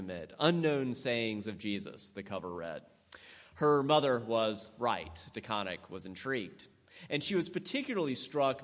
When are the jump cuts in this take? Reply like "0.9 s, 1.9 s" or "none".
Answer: none